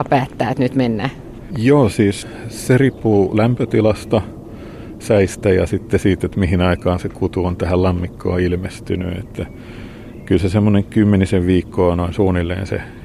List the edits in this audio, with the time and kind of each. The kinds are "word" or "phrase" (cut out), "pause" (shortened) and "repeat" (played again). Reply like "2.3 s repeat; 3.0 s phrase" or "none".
none